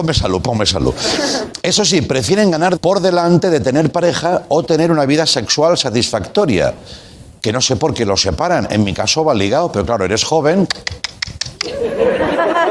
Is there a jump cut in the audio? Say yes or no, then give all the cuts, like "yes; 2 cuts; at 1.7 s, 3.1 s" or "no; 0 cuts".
yes; 1 cut; at 2.8 s